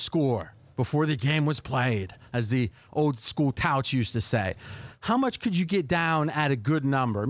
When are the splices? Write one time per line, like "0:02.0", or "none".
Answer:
none